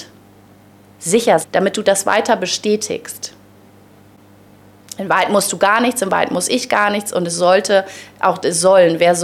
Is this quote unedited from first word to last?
no; 1 cut; at 1.4 s

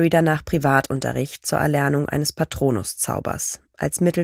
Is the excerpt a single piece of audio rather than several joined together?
yes; 0 cuts

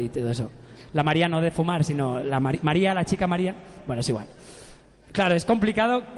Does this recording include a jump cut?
no; 0 cuts

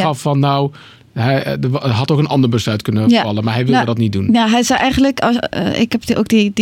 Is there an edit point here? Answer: no; 0 cuts

